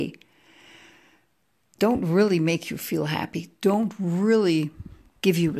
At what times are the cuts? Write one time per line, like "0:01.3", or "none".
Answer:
none